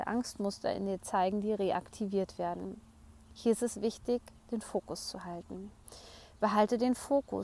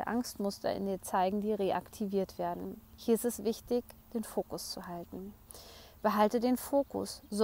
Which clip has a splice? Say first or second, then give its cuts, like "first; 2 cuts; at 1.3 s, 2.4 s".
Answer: second; 1 cut; at 2.9 s